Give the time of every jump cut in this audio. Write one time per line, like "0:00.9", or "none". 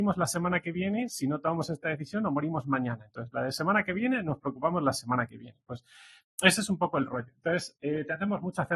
none